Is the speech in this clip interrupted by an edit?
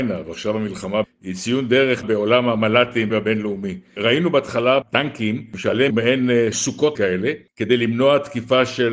yes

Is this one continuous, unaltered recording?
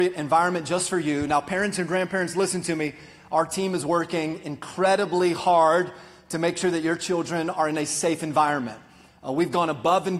yes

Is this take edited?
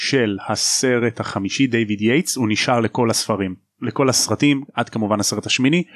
no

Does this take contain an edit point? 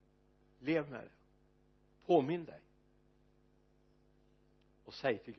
no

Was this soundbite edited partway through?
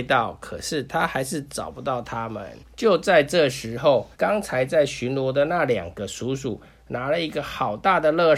yes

